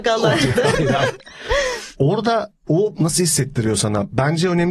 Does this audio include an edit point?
yes; 1 cut; at 2.7 s

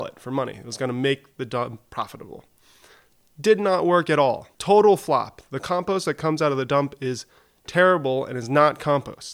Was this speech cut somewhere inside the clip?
yes; 1 cut; at 4.5 s

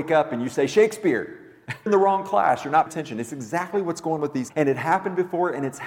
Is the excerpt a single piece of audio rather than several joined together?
no; 4 cuts; at 1.9 s, 2.9 s, 4.2 s, 4.5 s

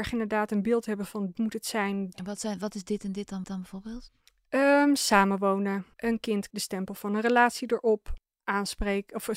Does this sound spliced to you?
yes; 4 cuts; at 1.3 s, 3.4 s, 5.9 s, 6.5 s

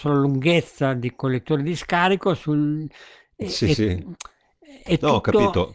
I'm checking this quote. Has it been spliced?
no; 0 cuts

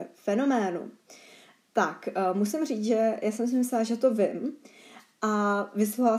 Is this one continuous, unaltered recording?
yes; 0 cuts

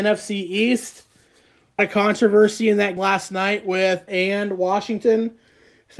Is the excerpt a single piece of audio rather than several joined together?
no; 3 cuts; at 1.8 s, 3.0 s, 4.1 s

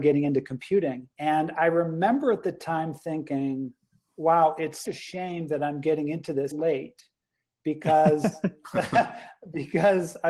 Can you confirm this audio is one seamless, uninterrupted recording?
no; 3 cuts; at 1.1 s, 4.8 s, 6.5 s

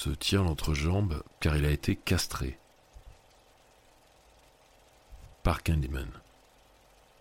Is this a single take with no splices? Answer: no; 2 cuts; at 1.3 s, 5.3 s

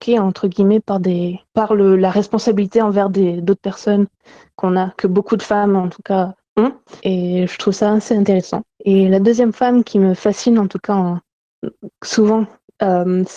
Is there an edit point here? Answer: yes; 4 cuts; at 1.5 s, 5.0 s, 7.0 s, 8.7 s

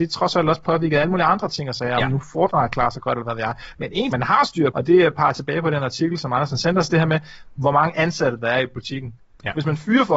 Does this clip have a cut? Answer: yes; 2 cuts; at 4.1 s, 4.7 s

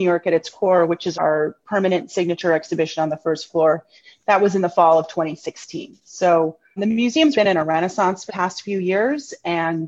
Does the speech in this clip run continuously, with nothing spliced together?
no; 4 cuts; at 1.1 s, 6.8 s, 7.3 s, 8.3 s

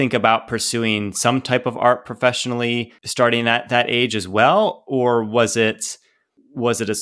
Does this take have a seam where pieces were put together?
no; 0 cuts

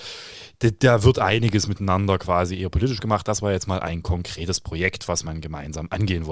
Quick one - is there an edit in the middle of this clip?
no; 0 cuts

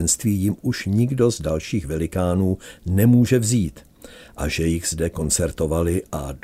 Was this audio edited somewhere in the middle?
no; 0 cuts

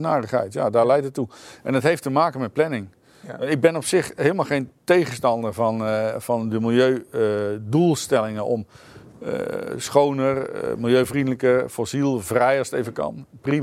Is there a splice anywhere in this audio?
no; 0 cuts

